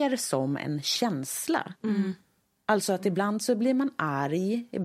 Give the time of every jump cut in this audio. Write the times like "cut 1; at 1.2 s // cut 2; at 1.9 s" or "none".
cut 1; at 1.8 s

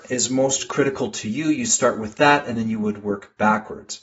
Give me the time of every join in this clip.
none

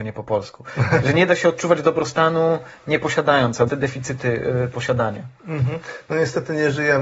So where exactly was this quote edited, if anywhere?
cut 1; at 1.0 s // cut 2; at 3.7 s

